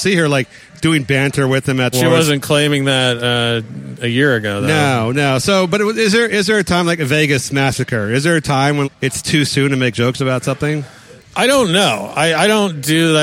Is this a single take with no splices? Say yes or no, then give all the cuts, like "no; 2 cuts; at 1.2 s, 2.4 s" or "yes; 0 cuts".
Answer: no; 3 cuts; at 1.9 s, 8.8 s, 11.2 s